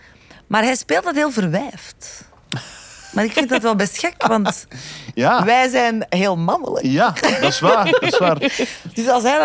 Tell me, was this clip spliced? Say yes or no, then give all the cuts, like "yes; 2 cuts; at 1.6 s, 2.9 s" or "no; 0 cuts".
no; 0 cuts